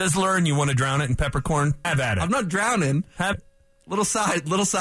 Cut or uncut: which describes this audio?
cut